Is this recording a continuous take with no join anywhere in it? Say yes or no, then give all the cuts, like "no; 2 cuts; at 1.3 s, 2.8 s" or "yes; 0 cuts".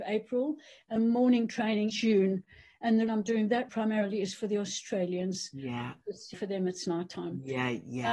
no; 5 cuts; at 1.0 s, 1.9 s, 3.1 s, 3.7 s, 6.3 s